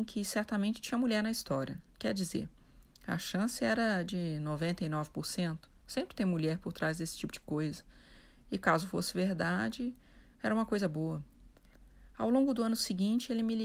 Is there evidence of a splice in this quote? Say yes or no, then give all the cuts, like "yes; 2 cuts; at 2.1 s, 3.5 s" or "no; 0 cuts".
no; 0 cuts